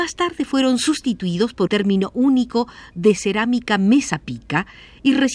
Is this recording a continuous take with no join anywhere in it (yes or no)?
no